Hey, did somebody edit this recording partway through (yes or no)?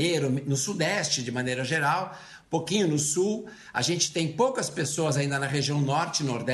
no